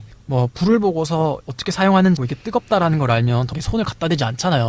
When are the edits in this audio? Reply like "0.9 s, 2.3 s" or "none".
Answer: 2.2 s, 3.5 s